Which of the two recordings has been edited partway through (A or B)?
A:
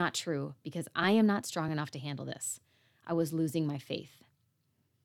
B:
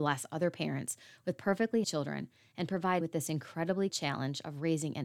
B